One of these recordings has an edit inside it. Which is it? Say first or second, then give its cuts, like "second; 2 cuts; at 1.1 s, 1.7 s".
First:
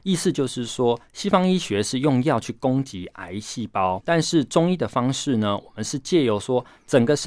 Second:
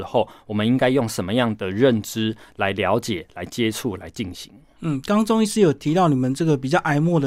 first; 1 cut; at 4.0 s